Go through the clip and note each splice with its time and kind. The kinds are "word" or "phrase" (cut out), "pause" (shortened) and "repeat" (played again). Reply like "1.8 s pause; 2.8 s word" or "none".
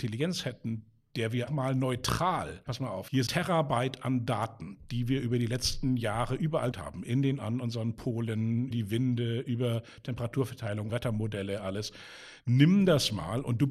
1.5 s word; 2.7 s word; 3.3 s word; 6.7 s word; 7.4 s word; 8.7 s word; 10.9 s word

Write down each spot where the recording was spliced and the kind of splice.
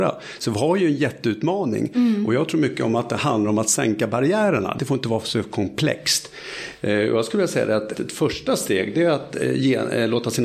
4.8 s phrase; 7.9 s word

